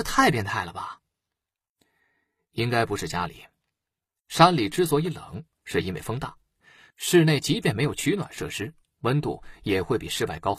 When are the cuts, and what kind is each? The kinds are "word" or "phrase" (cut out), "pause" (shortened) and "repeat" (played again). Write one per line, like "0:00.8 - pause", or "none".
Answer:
none